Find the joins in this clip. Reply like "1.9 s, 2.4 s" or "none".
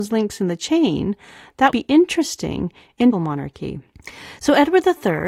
1.7 s, 3.1 s